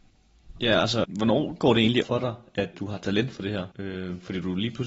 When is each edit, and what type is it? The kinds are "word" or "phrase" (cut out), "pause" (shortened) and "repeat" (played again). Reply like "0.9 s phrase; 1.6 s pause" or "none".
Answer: 1.0 s word; 2.0 s word; 2.7 s word; 3.7 s pause